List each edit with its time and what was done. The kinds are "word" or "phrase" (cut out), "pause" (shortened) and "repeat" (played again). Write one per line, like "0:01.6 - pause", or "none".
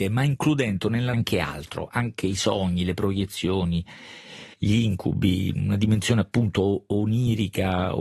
0:01.1 - word
0:04.5 - pause